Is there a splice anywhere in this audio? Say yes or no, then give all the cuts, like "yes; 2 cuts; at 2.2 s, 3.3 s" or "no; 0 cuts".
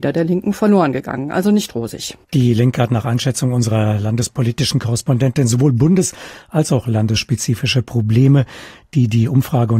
yes; 1 cut; at 2.2 s